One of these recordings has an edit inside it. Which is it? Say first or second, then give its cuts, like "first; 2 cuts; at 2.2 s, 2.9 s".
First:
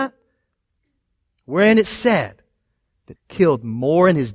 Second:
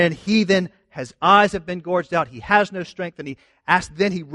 first; 1 cut; at 3.2 s